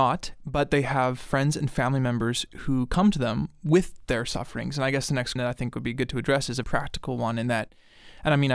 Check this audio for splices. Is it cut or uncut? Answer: cut